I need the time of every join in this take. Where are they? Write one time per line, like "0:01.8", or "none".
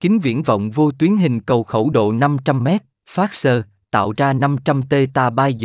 none